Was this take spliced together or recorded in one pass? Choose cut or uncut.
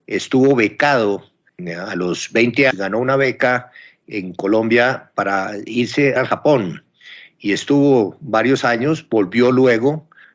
cut